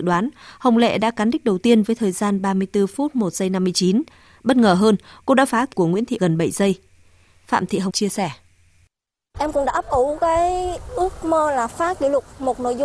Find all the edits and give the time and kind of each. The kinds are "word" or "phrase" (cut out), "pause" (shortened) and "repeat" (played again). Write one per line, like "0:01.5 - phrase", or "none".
0:05.7 - word
0:06.2 - word
0:07.9 - word